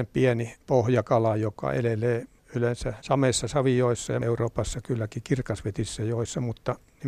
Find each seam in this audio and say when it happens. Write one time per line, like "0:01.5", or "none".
0:04.2